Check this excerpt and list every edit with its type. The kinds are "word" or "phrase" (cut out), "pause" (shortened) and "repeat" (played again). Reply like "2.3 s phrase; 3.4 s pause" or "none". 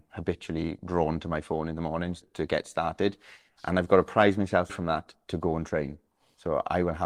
2.2 s word; 4.7 s word